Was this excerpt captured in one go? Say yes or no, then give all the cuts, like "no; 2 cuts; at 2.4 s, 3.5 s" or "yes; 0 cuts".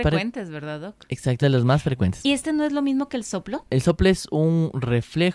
no; 1 cut; at 1.4 s